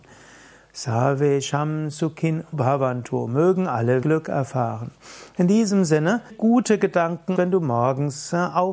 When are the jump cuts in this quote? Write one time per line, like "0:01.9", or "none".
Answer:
0:02.5
0:04.0
0:06.3
0:07.4